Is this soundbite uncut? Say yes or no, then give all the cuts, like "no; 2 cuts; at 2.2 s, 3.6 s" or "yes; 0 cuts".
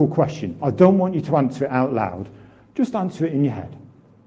yes; 0 cuts